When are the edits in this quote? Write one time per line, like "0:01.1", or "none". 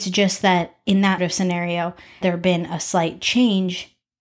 0:01.2
0:02.2